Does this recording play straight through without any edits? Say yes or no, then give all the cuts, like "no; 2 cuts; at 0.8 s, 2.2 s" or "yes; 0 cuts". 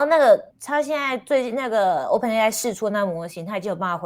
yes; 0 cuts